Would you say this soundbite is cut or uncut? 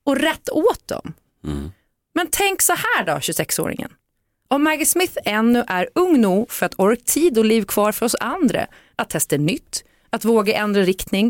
cut